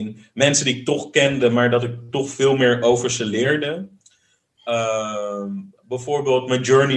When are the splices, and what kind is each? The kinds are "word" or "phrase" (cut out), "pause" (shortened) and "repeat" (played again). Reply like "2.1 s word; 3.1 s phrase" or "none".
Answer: 5.8 s pause